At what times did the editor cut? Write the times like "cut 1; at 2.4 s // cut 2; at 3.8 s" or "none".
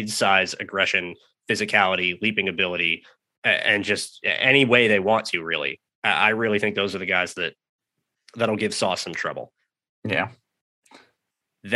none